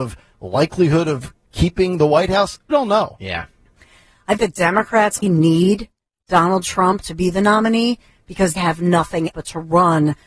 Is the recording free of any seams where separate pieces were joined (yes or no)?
no